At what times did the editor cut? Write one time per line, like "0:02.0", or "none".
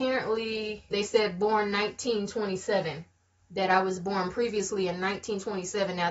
0:00.9